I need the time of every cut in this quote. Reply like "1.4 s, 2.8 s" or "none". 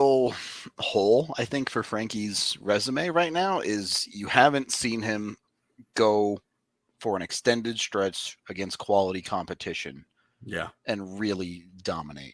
none